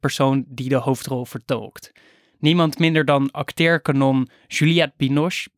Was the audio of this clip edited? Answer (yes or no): no